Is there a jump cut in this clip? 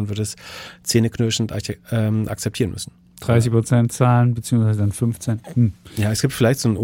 no; 0 cuts

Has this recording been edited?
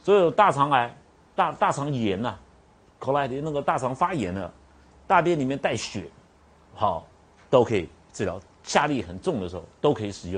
no; 0 cuts

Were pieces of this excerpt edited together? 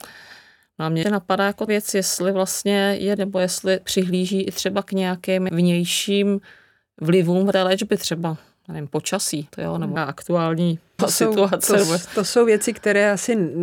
yes; 9 cuts; at 1.0 s, 1.7 s, 3.2 s, 3.8 s, 5.5 s, 7.5 s, 9.5 s, 10.0 s, 11.0 s

